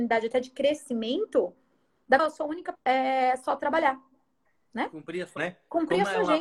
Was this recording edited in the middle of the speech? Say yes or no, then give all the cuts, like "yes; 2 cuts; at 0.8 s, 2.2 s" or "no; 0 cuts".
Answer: yes; 3 cuts; at 2.2 s, 2.7 s, 5.4 s